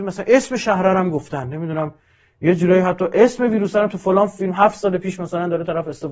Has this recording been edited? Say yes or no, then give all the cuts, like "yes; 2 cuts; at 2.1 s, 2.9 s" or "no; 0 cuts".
no; 0 cuts